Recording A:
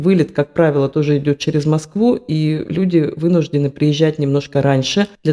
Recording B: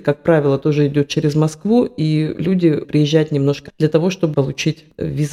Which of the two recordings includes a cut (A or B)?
B